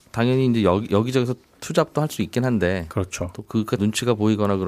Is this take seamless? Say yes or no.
no